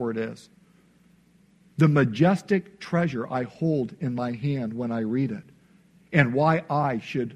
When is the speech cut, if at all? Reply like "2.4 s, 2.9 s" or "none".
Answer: none